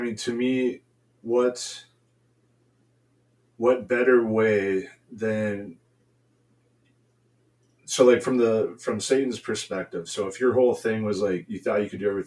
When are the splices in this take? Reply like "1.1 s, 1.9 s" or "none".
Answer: none